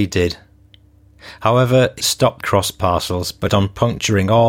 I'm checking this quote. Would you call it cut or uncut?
cut